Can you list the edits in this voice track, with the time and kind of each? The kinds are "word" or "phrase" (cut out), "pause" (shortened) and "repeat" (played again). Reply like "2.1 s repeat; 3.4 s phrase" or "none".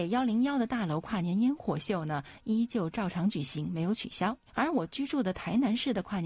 4.5 s pause